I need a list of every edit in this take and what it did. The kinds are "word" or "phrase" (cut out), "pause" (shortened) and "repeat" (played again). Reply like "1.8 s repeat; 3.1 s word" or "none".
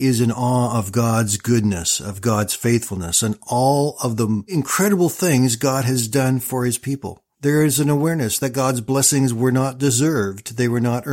7.3 s pause